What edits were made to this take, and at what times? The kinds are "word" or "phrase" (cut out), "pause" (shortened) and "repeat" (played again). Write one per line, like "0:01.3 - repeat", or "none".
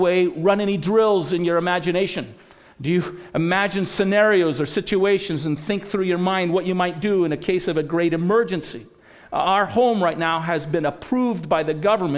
none

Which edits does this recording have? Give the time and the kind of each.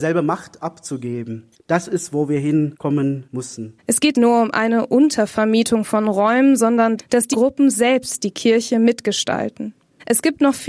0:04.1 - phrase
0:07.0 - word
0:07.3 - word

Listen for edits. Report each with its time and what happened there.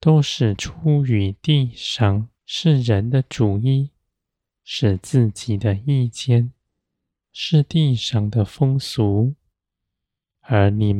0:02.4 - pause

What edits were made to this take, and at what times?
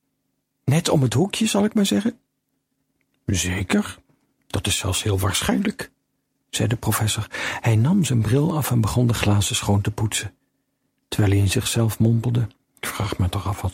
none

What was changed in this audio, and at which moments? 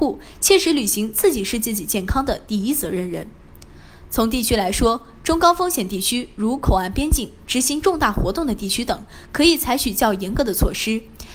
none

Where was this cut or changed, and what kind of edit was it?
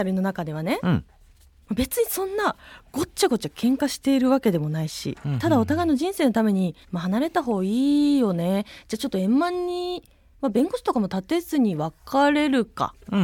0:06.8 - pause

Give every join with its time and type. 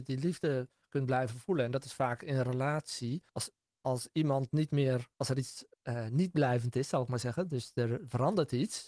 0:03.3 - pause
0:05.1 - pause
0:05.7 - pause

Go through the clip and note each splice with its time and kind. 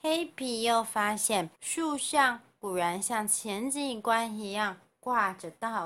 0:01.5 - pause

